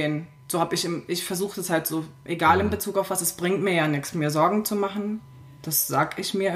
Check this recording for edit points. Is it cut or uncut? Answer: uncut